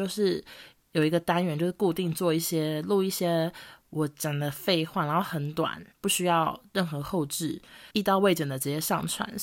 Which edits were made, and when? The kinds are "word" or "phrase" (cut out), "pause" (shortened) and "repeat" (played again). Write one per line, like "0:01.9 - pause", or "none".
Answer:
0:05.9 - pause
0:07.9 - pause